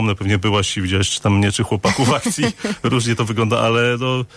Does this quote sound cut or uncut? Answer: uncut